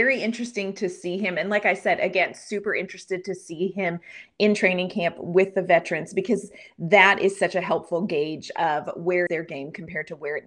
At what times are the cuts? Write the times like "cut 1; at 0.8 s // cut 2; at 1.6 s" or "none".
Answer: cut 1; at 9.3 s